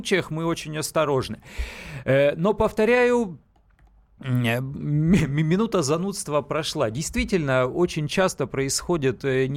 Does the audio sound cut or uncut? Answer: uncut